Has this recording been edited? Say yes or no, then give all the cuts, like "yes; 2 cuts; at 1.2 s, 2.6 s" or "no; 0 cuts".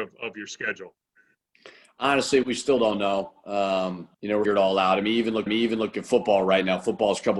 yes; 4 cuts; at 2.4 s, 4.1 s, 4.5 s, 5.5 s